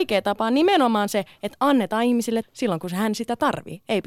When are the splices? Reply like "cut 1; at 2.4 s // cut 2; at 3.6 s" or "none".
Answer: cut 1; at 2.4 s

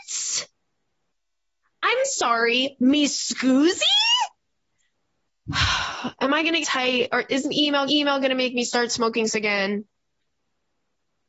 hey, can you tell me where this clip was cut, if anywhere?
cut 1; at 4.3 s // cut 2; at 6.6 s // cut 3; at 7.4 s // cut 4; at 7.9 s // cut 5; at 9.3 s

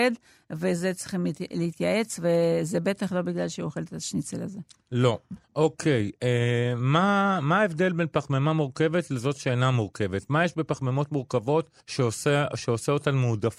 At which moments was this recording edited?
cut 1; at 5.4 s // cut 2; at 11.8 s

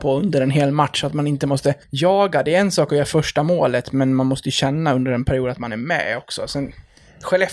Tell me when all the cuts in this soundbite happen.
cut 1; at 1.8 s

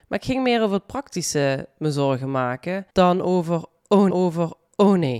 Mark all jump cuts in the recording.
cut 1; at 2.9 s // cut 2; at 4.1 s

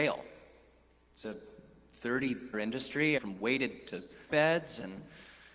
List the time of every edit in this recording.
cut 1; at 2.5 s // cut 2; at 3.2 s // cut 3; at 3.8 s // cut 4; at 4.3 s

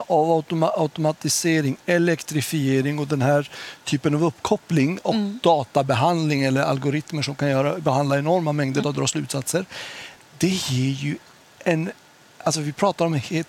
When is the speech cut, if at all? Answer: cut 1; at 8.8 s

